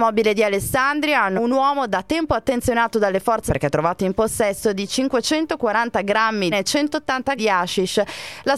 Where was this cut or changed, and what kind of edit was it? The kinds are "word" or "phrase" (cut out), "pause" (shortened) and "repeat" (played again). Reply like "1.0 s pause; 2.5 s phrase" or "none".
1.4 s word; 3.5 s word; 4.9 s word; 6.5 s phrase; 7.4 s word